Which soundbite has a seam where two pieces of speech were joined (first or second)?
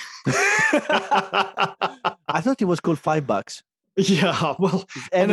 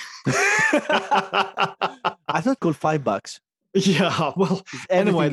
second